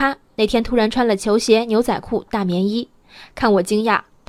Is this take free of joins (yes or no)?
yes